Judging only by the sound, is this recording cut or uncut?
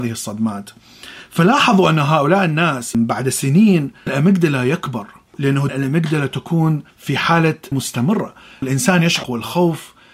cut